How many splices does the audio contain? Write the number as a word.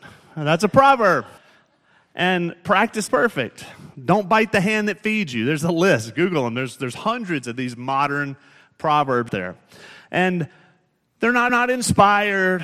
four